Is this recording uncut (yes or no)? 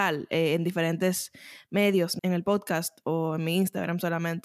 no